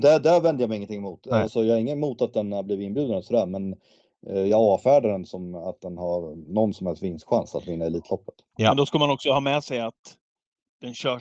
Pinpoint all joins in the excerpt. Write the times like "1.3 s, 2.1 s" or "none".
none